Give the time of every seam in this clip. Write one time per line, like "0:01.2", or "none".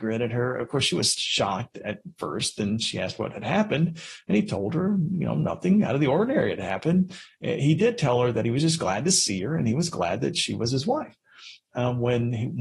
none

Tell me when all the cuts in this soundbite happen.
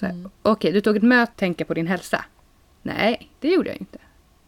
0:01.3

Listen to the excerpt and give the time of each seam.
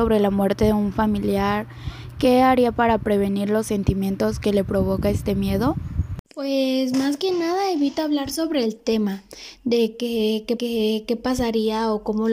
0:06.2
0:10.6

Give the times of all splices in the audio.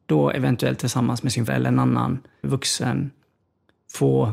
0:01.5
0:02.4

